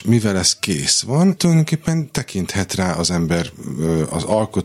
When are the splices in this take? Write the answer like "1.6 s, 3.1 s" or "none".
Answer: 1.4 s